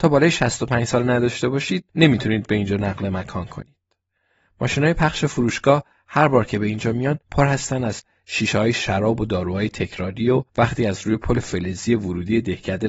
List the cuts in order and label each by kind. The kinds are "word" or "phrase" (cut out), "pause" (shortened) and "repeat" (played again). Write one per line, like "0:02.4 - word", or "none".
0:01.9 - pause
0:07.2 - pause
0:10.5 - pause